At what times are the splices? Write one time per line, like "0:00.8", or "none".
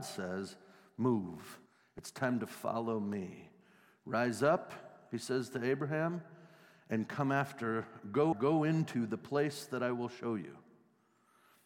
0:01.7
0:08.3